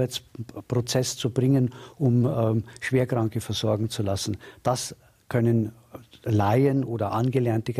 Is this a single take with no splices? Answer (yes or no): yes